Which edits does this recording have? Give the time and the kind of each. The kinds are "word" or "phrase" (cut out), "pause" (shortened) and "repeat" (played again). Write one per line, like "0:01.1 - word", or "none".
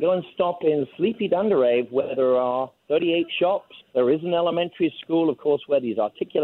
0:02.8 - pause
0:03.8 - pause